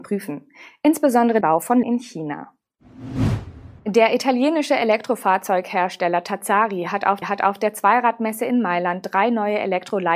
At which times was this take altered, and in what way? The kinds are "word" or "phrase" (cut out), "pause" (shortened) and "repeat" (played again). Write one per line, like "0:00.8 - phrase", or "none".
0:01.4 - word
0:01.8 - word
0:03.8 - pause
0:07.2 - repeat